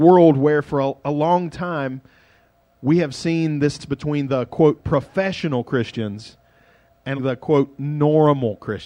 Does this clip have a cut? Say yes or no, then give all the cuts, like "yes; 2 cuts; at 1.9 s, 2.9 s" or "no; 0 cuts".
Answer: yes; 2 cuts; at 3.8 s, 7.2 s